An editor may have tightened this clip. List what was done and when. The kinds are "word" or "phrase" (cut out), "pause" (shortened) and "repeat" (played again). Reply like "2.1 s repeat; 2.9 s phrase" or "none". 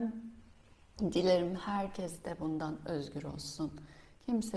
none